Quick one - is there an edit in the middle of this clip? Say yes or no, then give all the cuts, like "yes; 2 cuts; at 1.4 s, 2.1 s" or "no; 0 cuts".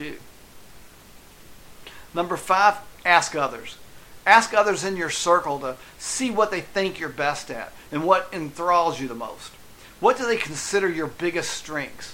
no; 0 cuts